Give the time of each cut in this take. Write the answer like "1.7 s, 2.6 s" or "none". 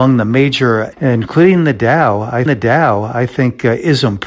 0.9 s, 2.5 s